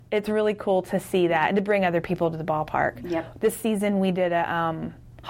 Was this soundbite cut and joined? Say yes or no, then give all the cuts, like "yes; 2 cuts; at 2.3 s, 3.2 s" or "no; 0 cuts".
no; 0 cuts